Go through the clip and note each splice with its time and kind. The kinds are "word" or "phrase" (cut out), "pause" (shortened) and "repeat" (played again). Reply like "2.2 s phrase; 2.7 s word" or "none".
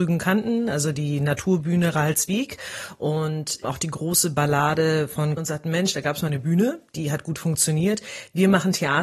3.6 s word; 5.4 s phrase